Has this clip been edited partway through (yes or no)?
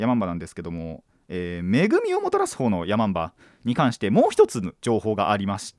no